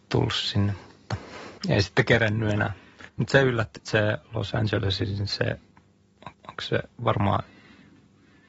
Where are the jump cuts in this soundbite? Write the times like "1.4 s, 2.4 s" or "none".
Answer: 1.6 s, 3.1 s, 3.8 s, 6.3 s

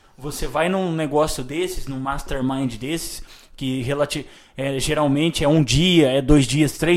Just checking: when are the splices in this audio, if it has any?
none

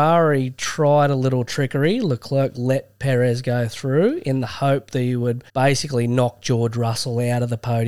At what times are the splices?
5.5 s

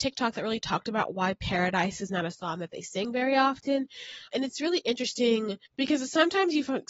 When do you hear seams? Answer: 5.6 s

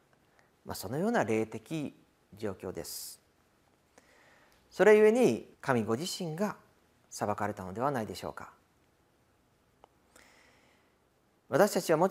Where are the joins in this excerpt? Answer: 5.5 s

